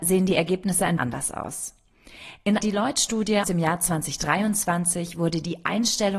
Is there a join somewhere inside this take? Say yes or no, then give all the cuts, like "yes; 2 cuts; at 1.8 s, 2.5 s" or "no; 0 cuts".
yes; 3 cuts; at 1.0 s, 2.6 s, 3.4 s